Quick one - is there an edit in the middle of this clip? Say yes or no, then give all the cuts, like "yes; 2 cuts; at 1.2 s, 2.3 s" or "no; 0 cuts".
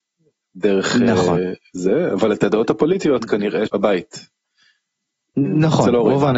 yes; 1 cut; at 3.7 s